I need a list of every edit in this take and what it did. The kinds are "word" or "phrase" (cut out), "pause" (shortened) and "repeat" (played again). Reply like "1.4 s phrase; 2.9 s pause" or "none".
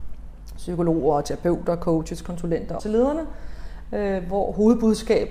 2.8 s word